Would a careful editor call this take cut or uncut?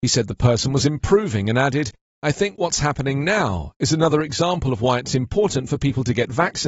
uncut